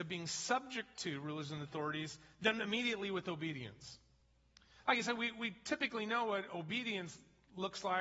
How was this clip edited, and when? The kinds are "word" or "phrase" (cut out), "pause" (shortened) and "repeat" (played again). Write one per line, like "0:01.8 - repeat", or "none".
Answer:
none